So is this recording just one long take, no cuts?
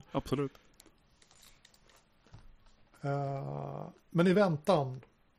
yes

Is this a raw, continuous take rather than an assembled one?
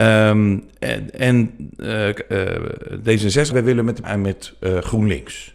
no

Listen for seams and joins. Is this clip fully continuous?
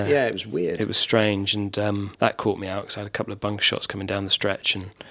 no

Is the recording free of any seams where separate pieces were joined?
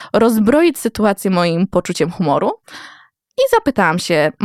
yes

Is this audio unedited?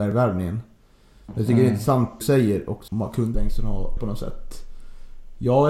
no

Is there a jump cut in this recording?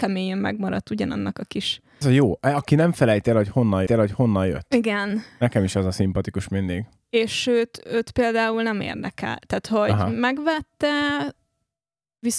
yes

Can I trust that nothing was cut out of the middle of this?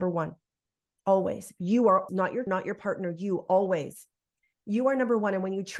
no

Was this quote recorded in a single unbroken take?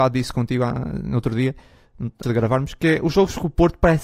no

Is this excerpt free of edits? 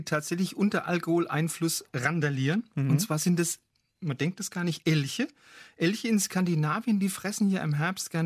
yes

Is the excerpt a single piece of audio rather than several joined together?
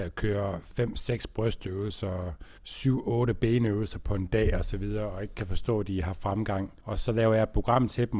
no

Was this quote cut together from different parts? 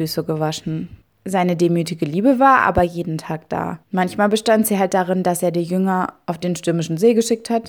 yes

